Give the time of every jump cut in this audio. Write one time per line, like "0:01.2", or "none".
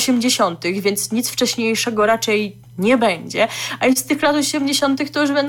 none